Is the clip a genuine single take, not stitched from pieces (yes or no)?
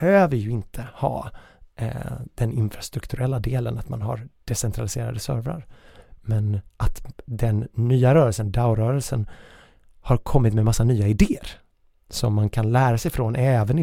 yes